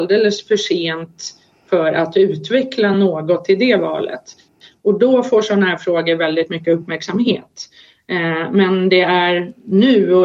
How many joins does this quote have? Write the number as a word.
zero